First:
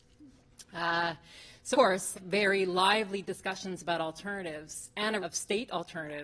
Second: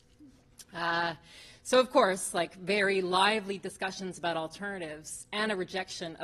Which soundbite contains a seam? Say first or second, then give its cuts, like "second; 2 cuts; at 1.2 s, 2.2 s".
first; 3 cuts; at 1.7 s, 2.1 s, 5.2 s